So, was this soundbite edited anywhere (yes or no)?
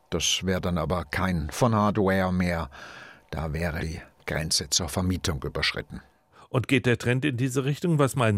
yes